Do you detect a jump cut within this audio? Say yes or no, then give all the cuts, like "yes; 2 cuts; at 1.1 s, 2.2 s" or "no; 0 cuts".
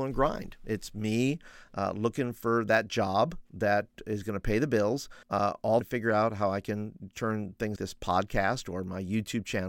yes; 3 cuts; at 5.2 s, 5.8 s, 7.8 s